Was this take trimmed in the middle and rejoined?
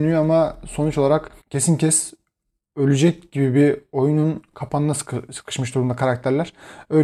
yes; 1 cut; at 1.4 s

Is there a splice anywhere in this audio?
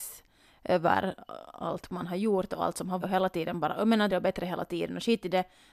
yes; 2 cuts; at 3.0 s, 4.1 s

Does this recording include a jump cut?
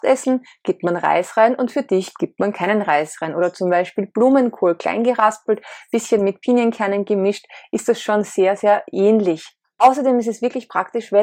no; 0 cuts

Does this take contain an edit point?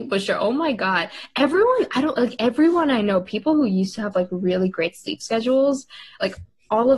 no; 0 cuts

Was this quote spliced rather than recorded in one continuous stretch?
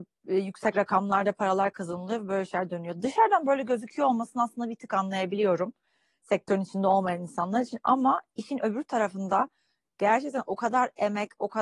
no; 0 cuts

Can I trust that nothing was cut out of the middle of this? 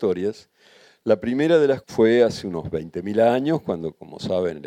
no; 1 cut; at 1.8 s

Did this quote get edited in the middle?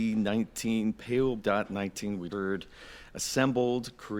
yes; 2 cuts; at 1.4 s, 2.3 s

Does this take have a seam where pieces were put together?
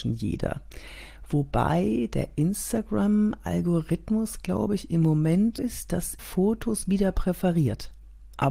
yes; 2 cuts; at 5.6 s, 6.2 s

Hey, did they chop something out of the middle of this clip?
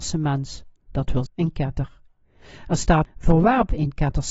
yes; 2 cuts; at 1.3 s, 3.0 s

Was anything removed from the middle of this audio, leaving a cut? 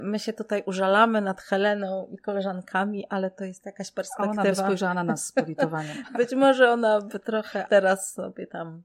yes; 1 cut; at 7.7 s

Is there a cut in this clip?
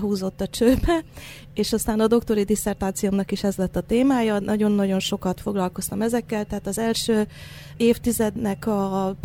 no; 0 cuts

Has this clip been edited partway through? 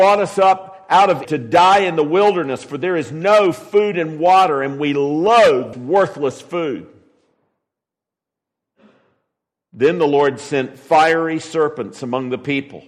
yes; 2 cuts; at 1.2 s, 5.7 s

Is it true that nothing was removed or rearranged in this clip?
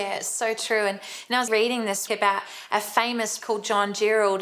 no; 3 cuts; at 1.5 s, 2.1 s, 3.4 s

